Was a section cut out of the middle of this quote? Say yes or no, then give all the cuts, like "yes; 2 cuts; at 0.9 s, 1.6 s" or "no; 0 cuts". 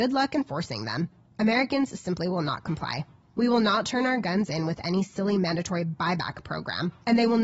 no; 0 cuts